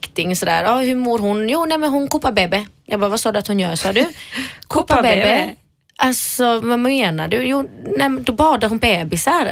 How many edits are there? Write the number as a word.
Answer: one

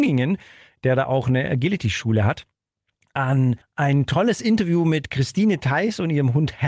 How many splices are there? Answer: one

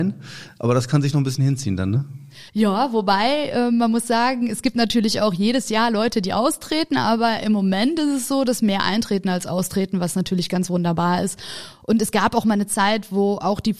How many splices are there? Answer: one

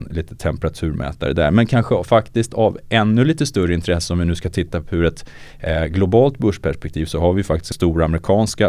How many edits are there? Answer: one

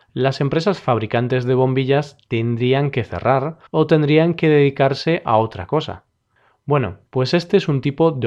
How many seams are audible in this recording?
two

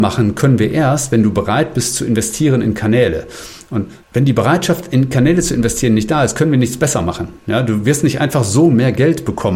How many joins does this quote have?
two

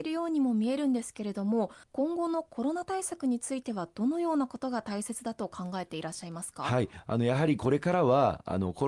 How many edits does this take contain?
one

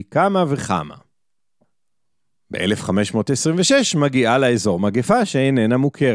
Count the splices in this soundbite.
zero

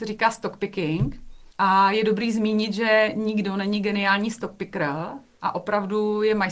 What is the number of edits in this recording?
one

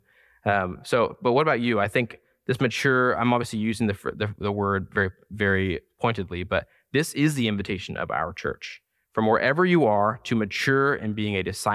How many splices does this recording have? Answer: zero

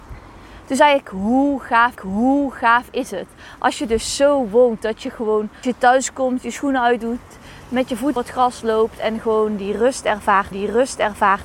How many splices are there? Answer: four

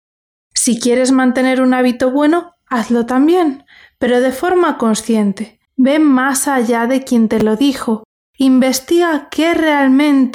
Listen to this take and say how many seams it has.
one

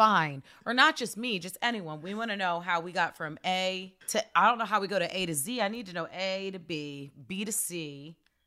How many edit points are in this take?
one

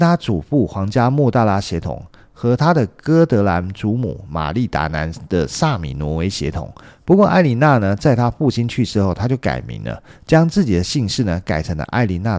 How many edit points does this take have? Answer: zero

